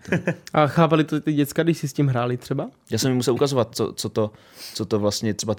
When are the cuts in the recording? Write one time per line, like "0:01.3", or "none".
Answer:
none

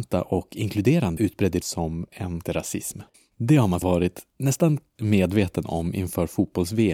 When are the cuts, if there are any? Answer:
0:01.2
0:01.6
0:02.4
0:03.1
0:03.8
0:05.0

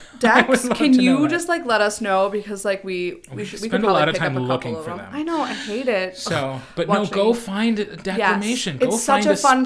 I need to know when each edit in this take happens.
none

